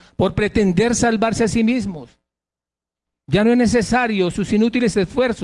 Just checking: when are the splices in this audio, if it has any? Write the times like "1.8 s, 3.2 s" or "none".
none